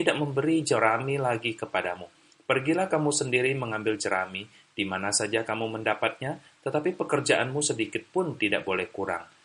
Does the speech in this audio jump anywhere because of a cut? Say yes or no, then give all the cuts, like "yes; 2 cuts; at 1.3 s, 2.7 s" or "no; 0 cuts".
no; 0 cuts